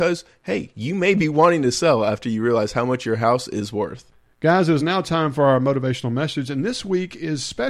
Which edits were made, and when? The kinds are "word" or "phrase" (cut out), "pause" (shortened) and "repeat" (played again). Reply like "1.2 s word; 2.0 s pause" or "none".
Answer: none